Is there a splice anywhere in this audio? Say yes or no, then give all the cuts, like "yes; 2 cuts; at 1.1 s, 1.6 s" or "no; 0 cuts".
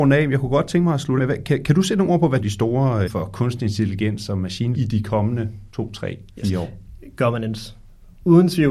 yes; 6 cuts; at 1.2 s, 2.4 s, 3.1 s, 4.7 s, 5.7 s, 6.3 s